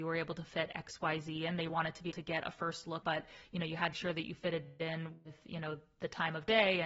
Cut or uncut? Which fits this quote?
cut